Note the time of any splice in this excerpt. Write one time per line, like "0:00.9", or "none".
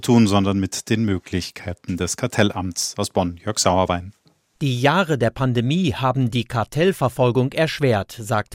none